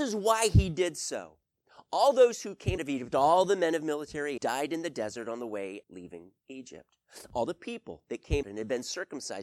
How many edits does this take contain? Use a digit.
4